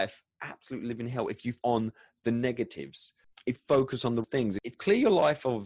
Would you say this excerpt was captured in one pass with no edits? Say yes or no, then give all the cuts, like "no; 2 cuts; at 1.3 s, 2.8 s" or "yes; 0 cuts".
no; 4 cuts; at 1.6 s, 3.6 s, 4.2 s, 4.7 s